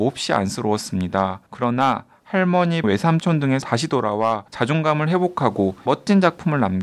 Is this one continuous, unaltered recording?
no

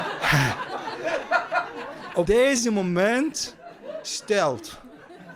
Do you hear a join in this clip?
yes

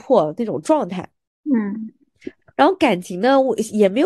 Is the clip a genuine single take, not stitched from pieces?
yes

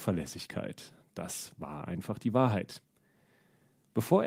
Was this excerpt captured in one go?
yes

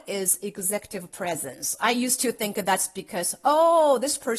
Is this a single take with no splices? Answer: yes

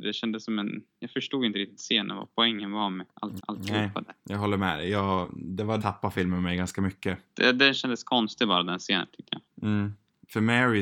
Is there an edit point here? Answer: yes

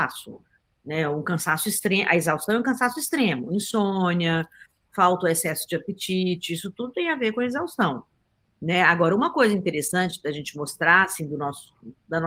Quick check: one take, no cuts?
yes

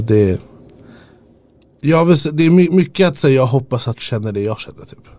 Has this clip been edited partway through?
yes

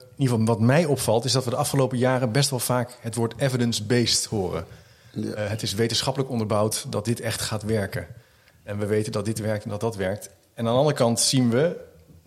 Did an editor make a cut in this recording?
no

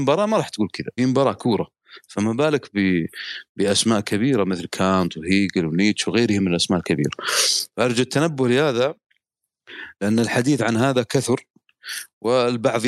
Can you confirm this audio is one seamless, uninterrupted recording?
no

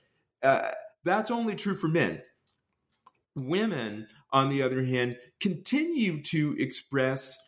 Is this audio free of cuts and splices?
yes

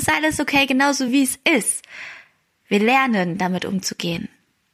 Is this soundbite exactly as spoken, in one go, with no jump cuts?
yes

